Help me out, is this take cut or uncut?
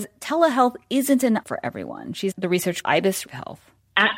cut